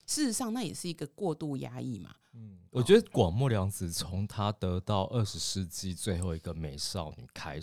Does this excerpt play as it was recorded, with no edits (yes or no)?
no